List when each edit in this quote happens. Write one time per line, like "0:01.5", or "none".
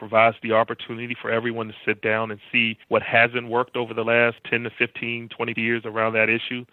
0:02.0
0:02.8
0:05.6